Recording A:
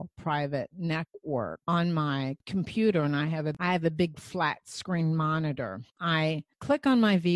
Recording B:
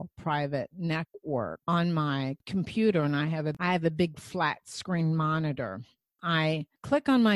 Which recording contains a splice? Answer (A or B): A